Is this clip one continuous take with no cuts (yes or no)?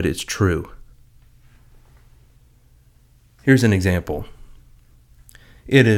yes